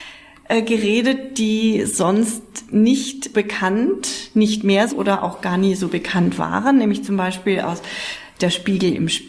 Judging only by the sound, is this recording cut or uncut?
cut